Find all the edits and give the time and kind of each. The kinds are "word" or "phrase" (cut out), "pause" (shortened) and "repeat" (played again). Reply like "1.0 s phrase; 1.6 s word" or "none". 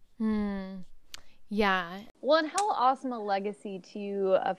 none